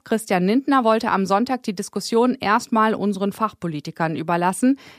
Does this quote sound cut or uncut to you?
uncut